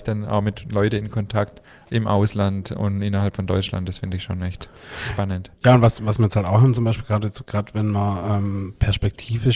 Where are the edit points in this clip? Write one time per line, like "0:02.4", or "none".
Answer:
0:01.7